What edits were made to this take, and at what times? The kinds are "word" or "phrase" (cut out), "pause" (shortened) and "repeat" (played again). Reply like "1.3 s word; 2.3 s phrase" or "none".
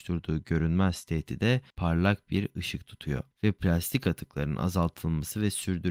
1.7 s pause; 3.3 s pause